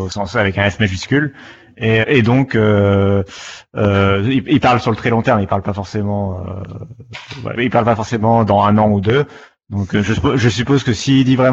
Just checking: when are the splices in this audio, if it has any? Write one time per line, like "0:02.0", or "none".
0:02.0
0:07.5